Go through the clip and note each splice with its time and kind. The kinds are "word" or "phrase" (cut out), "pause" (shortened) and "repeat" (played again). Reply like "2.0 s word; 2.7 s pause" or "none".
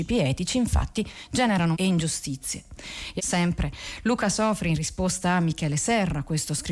1.7 s word; 3.2 s word